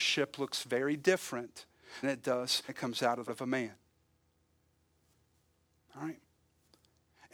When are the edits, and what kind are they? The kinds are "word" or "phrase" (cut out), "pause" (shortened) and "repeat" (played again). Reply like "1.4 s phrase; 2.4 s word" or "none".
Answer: 2.0 s word; 2.7 s word; 3.3 s word